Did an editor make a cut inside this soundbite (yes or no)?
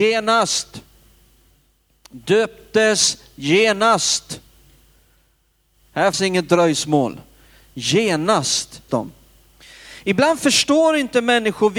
yes